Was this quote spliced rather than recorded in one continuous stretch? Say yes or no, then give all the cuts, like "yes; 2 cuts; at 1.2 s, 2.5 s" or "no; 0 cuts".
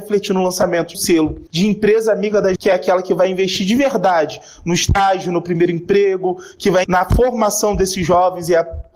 yes; 4 cuts; at 0.9 s, 1.5 s, 2.6 s, 6.8 s